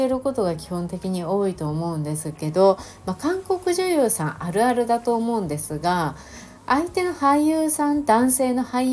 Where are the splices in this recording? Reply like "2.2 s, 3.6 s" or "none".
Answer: 6.6 s